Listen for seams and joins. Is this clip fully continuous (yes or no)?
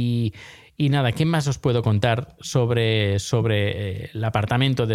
yes